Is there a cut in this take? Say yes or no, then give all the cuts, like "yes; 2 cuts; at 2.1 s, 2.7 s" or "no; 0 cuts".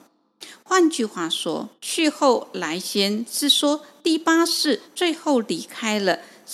yes; 2 cuts; at 1.8 s, 4.9 s